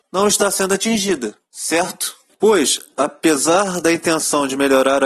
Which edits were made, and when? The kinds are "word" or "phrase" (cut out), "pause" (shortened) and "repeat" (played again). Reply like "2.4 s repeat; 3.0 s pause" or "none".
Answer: none